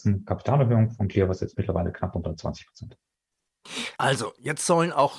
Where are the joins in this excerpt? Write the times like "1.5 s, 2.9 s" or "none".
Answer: 4.0 s